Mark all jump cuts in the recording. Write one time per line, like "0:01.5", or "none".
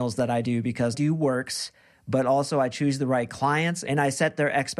0:00.9